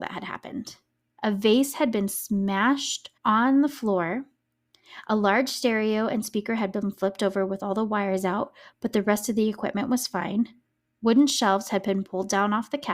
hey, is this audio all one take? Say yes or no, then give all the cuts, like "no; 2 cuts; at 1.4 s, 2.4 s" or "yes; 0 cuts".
no; 1 cut; at 3.2 s